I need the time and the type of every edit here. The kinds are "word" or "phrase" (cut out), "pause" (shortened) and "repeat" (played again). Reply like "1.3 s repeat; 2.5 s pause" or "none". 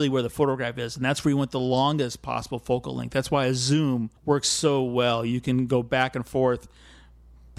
4.2 s pause